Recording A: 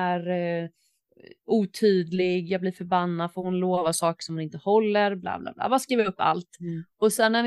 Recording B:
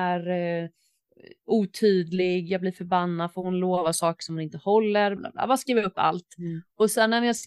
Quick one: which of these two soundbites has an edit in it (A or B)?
B